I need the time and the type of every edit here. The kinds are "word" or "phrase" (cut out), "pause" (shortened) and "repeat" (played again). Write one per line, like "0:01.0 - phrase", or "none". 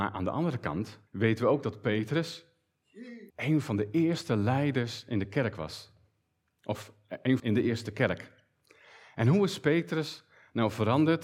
0:01.1 - pause
0:03.3 - pause
0:07.4 - phrase